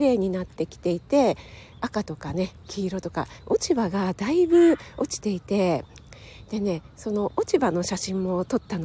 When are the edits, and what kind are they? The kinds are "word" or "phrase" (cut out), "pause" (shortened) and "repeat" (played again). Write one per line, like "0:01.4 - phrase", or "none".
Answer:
0:03.4 - word